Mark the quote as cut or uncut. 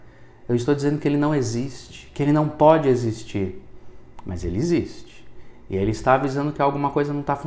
uncut